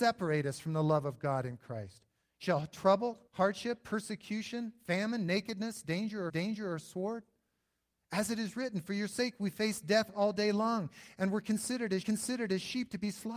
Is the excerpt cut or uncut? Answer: cut